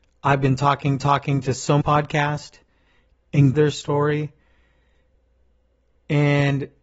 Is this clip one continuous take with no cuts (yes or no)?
no